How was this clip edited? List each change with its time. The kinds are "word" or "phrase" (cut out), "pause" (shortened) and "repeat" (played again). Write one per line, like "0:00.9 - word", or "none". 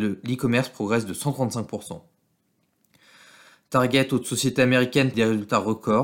0:05.1 - word